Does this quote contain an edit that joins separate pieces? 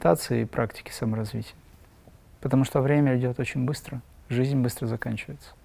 no; 0 cuts

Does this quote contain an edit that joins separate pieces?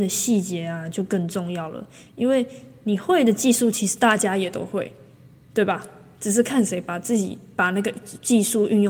no; 0 cuts

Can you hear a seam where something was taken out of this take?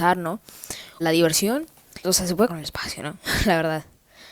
yes; 3 cuts; at 1.0 s, 2.0 s, 2.5 s

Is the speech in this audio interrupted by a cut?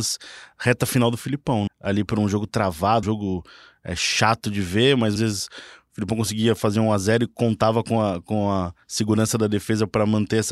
yes; 3 cuts; at 1.7 s, 3.0 s, 5.2 s

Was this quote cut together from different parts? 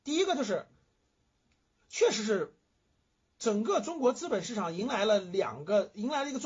no; 0 cuts

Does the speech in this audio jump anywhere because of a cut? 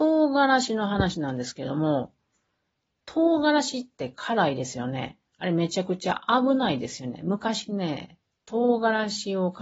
no; 0 cuts

